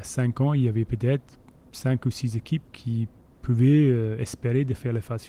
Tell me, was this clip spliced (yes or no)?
no